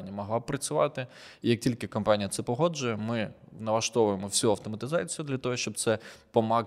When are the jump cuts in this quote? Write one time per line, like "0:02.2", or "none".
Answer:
none